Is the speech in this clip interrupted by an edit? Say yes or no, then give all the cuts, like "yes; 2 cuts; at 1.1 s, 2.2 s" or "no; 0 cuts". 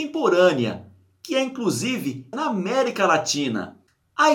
yes; 1 cut; at 2.3 s